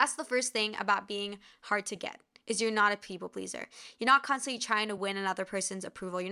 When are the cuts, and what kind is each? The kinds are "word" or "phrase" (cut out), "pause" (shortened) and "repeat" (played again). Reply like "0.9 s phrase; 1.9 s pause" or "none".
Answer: none